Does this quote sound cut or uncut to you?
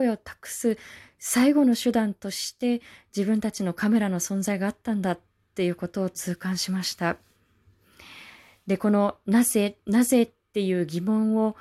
uncut